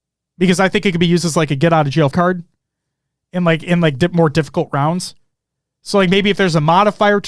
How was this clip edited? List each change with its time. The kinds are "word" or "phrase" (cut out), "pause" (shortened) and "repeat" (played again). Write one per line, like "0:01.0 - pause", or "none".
0:02.1 - word